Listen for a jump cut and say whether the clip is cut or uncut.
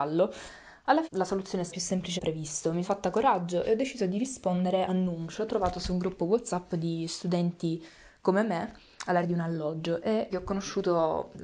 cut